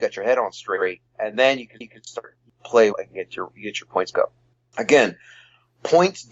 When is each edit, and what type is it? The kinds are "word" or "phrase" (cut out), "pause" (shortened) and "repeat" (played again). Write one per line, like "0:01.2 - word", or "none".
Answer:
0:01.1 - pause
0:01.8 - repeat
0:02.9 - word
0:04.1 - word